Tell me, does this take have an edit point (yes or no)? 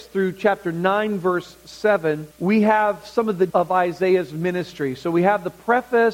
yes